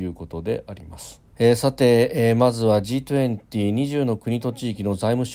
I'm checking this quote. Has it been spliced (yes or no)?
yes